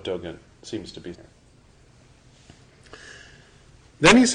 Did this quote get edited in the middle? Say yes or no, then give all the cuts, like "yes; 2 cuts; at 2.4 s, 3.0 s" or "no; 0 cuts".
yes; 1 cut; at 1.1 s